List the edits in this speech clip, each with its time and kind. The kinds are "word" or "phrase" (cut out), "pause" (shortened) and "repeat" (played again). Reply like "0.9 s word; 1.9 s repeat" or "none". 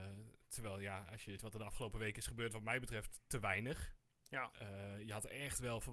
1.4 s word